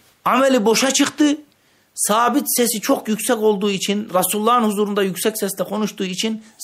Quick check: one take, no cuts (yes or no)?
yes